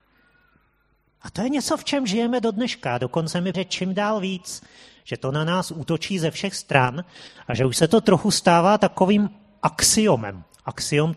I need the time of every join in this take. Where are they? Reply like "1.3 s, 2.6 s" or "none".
3.5 s